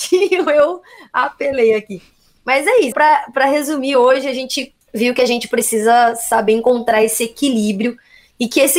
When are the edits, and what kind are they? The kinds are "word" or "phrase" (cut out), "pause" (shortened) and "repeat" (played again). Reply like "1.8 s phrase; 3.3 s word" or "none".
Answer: 2.9 s word